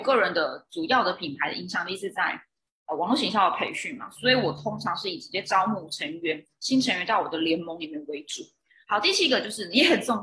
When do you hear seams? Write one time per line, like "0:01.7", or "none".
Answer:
none

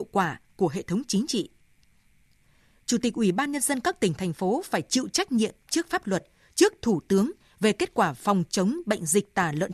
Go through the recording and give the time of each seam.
none

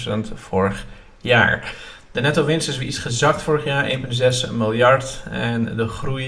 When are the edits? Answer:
none

